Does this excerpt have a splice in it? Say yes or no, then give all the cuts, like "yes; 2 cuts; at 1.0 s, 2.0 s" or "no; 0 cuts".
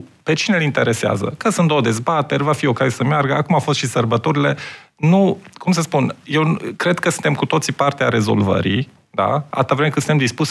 no; 0 cuts